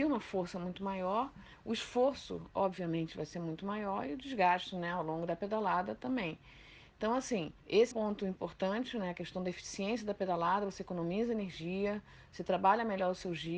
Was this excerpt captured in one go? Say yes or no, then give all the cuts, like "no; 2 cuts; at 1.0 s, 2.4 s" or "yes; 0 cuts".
no; 2 cuts; at 7.6 s, 7.9 s